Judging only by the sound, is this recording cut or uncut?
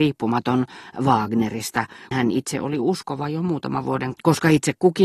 cut